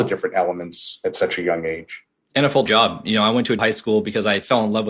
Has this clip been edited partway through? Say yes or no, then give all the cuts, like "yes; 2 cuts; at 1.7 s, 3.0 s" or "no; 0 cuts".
yes; 2 cuts; at 2.7 s, 3.6 s